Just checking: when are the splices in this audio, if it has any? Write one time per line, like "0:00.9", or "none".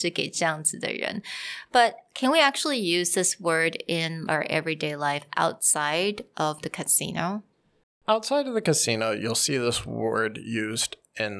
0:04.3